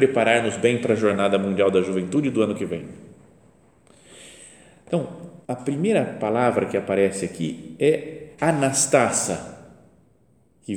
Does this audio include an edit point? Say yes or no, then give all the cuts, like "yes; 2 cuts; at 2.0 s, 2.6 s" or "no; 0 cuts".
yes; 2 cuts; at 5.4 s, 8.3 s